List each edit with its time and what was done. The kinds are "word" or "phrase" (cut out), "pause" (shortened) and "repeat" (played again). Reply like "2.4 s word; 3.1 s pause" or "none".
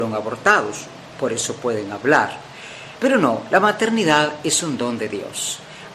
none